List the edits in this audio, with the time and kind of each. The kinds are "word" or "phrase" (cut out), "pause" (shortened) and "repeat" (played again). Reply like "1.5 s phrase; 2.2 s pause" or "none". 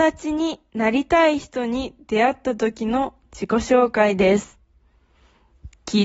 none